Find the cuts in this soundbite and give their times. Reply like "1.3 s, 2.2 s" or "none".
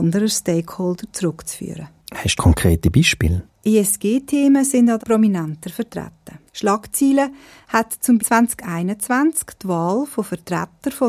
2.3 s, 5.0 s, 6.5 s, 8.2 s